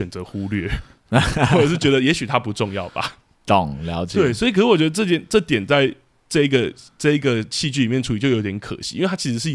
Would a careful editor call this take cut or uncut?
uncut